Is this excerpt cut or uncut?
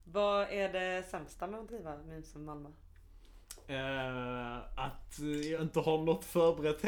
uncut